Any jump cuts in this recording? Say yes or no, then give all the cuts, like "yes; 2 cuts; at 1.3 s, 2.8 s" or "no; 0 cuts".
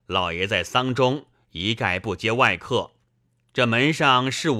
no; 0 cuts